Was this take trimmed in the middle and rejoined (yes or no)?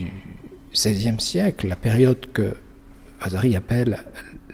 no